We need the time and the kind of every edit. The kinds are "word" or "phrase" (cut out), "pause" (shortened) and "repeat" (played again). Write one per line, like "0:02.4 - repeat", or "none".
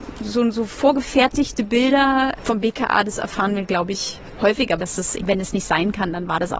0:02.4 - word
0:04.8 - phrase
0:05.2 - word